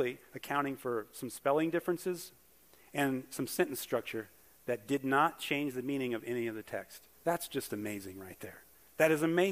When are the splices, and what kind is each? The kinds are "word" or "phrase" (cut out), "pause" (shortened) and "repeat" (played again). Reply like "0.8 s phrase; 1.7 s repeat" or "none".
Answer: 7.2 s pause